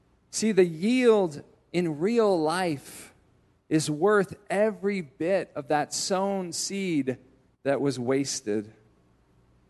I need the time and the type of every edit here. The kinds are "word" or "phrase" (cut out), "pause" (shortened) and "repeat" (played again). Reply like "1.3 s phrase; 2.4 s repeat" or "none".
none